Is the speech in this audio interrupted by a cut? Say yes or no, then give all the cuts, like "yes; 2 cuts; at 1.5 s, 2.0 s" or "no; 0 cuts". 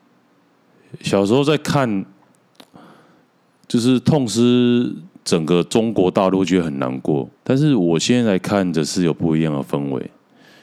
yes; 1 cut; at 7.4 s